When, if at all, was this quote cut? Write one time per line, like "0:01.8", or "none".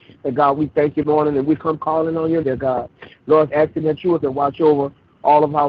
0:01.0
0:02.4
0:03.5
0:04.2

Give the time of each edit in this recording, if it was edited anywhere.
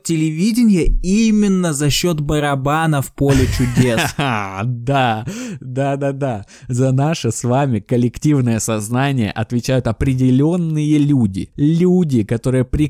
none

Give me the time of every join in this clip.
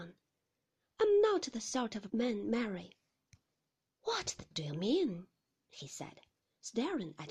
0:02.1
0:04.5

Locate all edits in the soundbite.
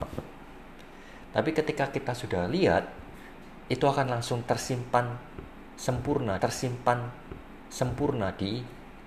0:06.4

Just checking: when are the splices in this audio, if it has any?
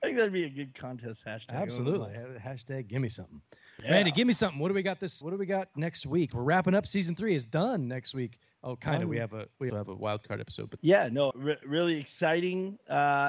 0:05.2
0:09.7
0:10.8
0:11.3

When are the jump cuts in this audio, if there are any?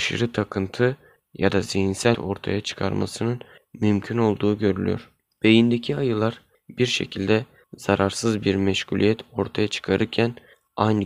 0:02.1

